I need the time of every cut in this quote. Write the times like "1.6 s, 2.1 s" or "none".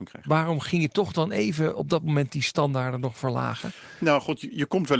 none